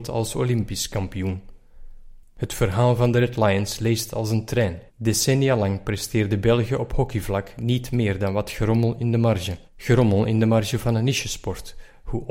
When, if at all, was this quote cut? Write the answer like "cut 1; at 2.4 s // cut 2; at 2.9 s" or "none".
cut 1; at 4.9 s // cut 2; at 9.7 s